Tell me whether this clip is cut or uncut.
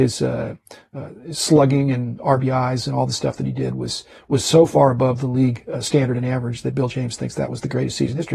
uncut